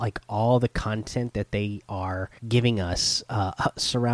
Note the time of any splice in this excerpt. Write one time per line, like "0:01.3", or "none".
0:02.4